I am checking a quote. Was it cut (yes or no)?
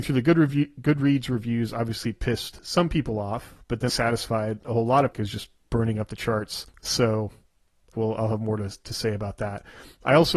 yes